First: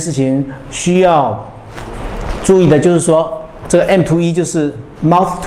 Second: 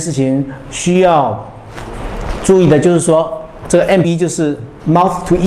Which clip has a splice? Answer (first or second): second